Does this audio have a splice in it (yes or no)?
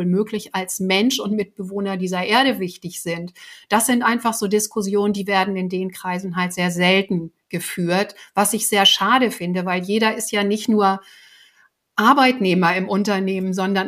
no